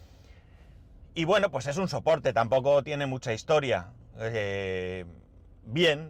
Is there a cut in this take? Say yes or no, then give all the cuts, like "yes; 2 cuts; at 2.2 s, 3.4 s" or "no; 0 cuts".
no; 0 cuts